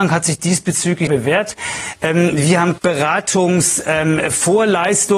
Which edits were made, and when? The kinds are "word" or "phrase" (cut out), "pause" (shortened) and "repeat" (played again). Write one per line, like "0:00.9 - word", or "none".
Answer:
0:01.1 - word
0:02.8 - word

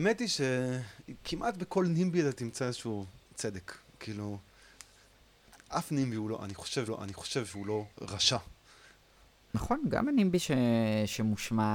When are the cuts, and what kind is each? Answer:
0:03.2 - pause
0:06.9 - repeat
0:07.9 - pause

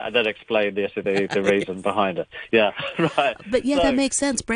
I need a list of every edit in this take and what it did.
none

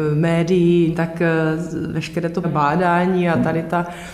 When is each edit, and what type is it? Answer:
0:00.9 - word
0:02.4 - word

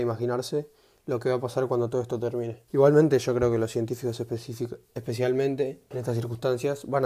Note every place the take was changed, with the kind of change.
0:02.7 - pause

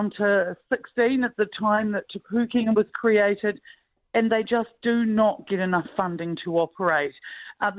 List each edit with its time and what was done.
none

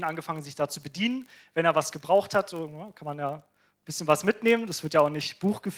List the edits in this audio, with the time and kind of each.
none

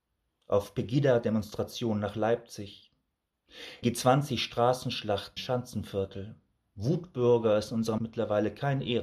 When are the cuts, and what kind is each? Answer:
0:03.8 - word
0:05.4 - word
0:08.0 - word

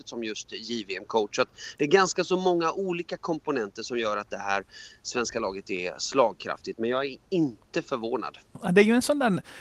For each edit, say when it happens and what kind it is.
none

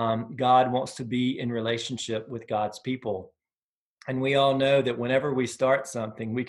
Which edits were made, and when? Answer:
none

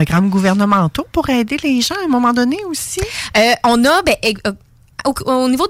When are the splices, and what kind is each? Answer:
none

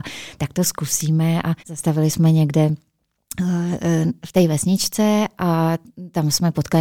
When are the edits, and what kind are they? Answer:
0:01.6 - pause

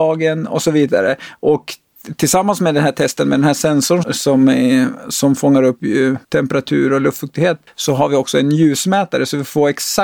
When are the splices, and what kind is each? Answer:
0:04.0 - word
0:06.2 - pause

